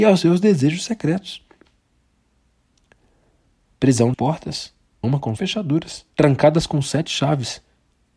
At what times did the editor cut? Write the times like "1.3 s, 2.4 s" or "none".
4.1 s, 5.0 s, 5.4 s, 6.1 s